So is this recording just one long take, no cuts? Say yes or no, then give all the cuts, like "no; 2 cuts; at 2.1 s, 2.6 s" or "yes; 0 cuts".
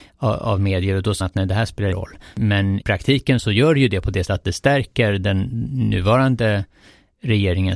no; 4 cuts; at 1.2 s, 1.9 s, 2.8 s, 4.2 s